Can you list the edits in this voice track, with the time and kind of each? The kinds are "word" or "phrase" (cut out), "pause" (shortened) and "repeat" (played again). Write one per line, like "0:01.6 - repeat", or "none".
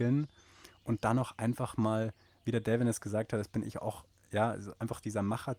none